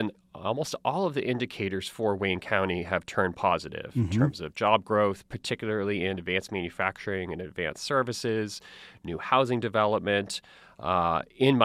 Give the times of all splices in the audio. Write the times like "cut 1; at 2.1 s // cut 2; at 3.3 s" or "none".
none

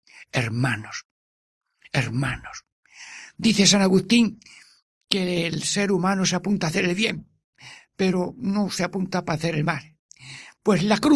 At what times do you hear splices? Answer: none

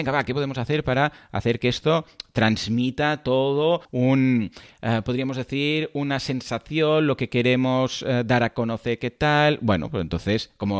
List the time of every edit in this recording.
cut 1; at 3.8 s

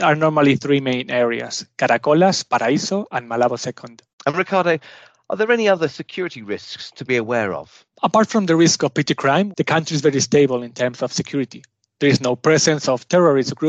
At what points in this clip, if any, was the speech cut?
none

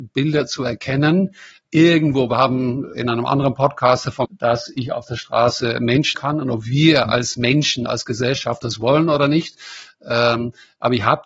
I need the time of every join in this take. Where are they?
cut 1; at 1.6 s // cut 2; at 2.9 s // cut 3; at 4.2 s // cut 4; at 6.1 s

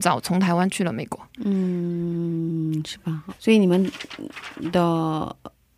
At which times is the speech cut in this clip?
cut 1; at 3.3 s

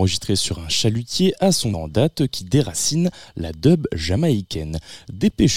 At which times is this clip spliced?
cut 1; at 1.7 s

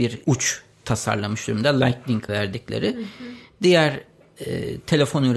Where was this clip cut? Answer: cut 1; at 2.3 s

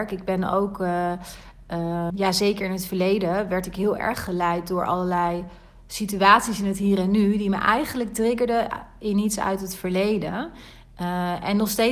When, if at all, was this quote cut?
cut 1; at 2.1 s

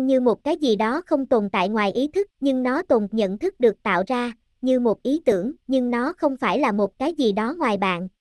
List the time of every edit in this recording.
cut 1; at 2.3 s // cut 2; at 3.1 s // cut 3; at 5.6 s

